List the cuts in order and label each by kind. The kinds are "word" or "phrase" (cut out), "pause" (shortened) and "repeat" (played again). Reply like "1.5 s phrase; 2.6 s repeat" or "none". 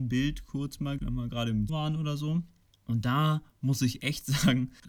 1.0 s word; 1.7 s word